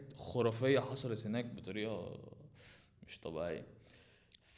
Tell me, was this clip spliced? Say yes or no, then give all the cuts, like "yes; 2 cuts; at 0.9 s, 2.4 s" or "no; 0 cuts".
no; 0 cuts